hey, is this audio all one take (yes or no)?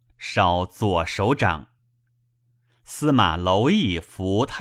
yes